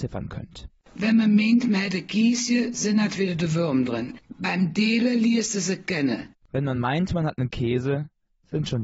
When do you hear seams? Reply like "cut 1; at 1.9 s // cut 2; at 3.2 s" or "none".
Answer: none